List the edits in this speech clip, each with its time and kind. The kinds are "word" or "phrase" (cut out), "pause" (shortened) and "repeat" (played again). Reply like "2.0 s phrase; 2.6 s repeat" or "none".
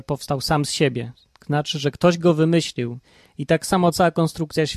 none